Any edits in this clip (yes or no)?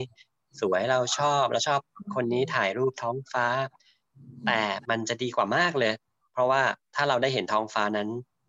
no